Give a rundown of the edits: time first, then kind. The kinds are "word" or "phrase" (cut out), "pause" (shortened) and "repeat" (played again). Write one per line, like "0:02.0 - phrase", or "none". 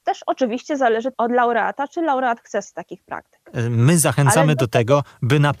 0:01.1 - word
0:02.6 - word

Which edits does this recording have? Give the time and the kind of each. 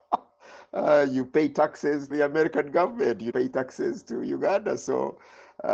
0:02.1 - word
0:03.3 - word

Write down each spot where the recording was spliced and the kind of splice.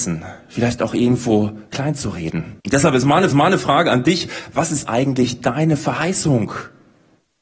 0:01.7 - pause
0:02.6 - pause
0:03.3 - repeat

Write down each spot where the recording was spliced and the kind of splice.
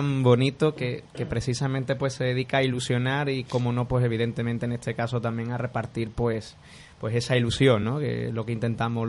none

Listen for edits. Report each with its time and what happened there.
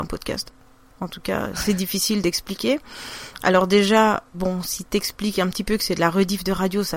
0:04.3 - pause

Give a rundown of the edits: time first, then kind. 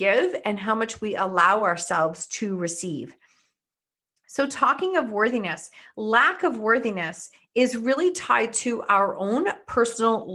none

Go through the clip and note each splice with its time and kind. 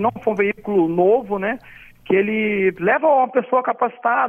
none

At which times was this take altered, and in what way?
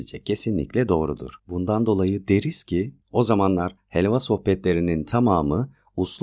0:01.4 - pause
0:03.0 - pause

